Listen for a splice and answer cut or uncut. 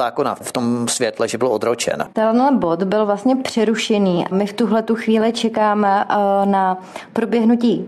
cut